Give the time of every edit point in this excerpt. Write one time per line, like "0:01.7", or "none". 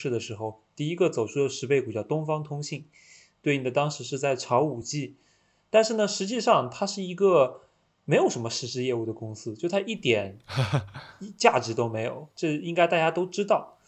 none